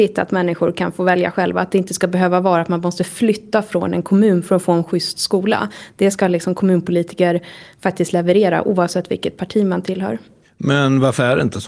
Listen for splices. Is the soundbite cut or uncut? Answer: uncut